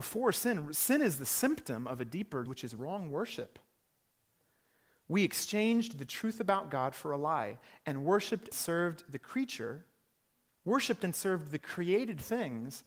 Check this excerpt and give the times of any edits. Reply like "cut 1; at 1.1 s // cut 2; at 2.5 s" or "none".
cut 1; at 2.5 s // cut 2; at 8.5 s